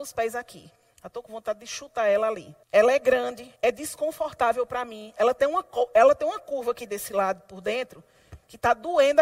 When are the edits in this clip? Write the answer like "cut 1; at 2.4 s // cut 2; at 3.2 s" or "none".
cut 1; at 0.9 s // cut 2; at 2.6 s // cut 3; at 3.6 s